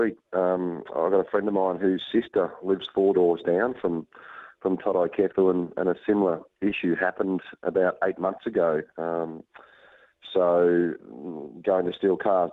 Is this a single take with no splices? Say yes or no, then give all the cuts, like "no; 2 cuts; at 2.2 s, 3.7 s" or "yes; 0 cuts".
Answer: yes; 0 cuts